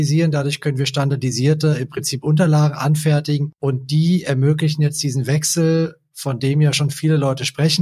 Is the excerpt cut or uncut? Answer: uncut